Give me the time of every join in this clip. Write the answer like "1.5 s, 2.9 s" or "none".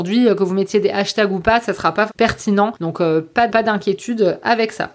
2.1 s, 3.5 s